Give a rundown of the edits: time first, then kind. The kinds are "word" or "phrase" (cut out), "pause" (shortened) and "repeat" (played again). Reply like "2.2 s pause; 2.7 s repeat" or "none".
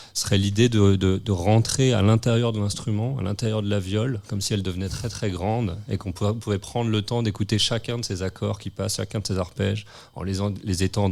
none